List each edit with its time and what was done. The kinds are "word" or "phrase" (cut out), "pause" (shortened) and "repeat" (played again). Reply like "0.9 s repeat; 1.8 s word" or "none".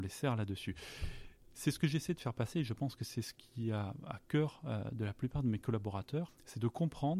none